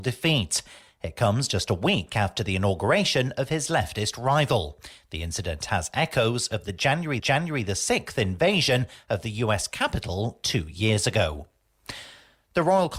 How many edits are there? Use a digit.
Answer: 1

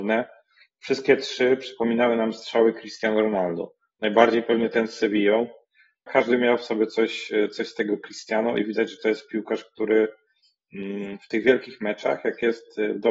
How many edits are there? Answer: 1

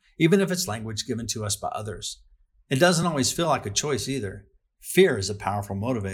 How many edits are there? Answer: 0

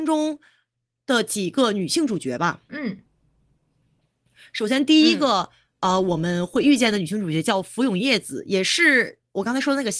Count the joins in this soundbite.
0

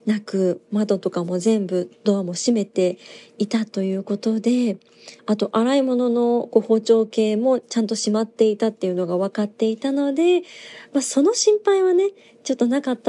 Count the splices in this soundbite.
1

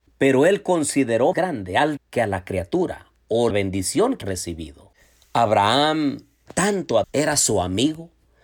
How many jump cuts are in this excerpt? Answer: 6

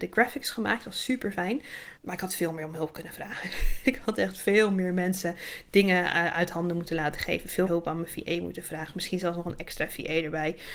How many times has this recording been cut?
2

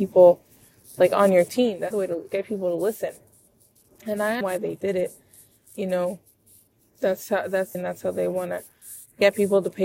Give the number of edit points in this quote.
4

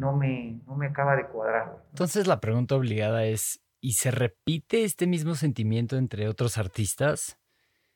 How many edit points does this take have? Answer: 1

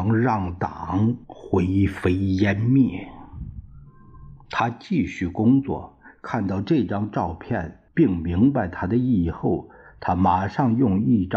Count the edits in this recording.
2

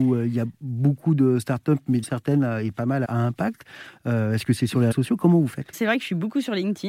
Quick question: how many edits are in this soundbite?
4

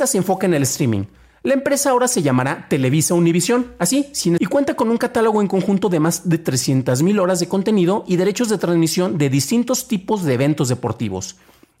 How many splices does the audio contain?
1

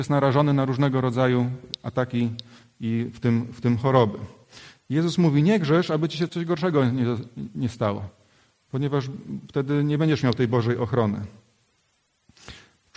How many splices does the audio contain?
1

